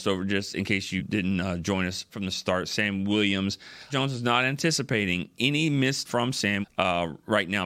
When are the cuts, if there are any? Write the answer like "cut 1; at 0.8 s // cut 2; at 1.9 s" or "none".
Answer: cut 1; at 1.0 s // cut 2; at 2.1 s // cut 3; at 3.9 s // cut 4; at 6.0 s // cut 5; at 6.6 s